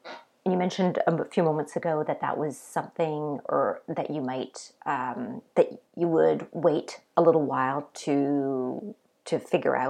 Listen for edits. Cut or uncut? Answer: cut